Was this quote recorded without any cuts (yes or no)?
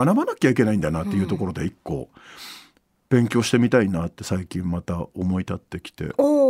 yes